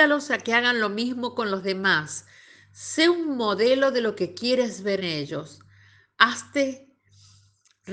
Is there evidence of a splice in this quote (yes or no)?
yes